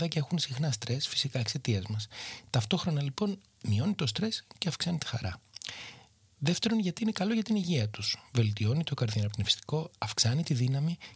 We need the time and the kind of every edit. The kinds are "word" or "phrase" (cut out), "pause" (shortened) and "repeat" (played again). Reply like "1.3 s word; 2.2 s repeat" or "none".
none